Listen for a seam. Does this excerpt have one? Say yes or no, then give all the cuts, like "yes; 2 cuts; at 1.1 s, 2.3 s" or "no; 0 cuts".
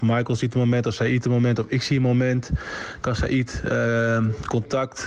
yes; 1 cut; at 1.2 s